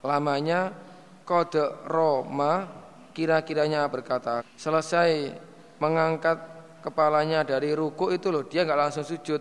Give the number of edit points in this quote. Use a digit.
2